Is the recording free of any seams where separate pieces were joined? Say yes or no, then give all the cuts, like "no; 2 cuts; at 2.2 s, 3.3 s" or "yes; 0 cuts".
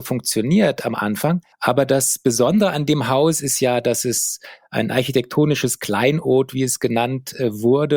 no; 1 cut; at 1.5 s